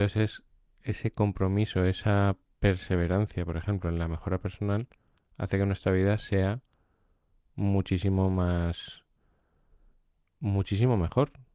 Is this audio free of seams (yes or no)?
yes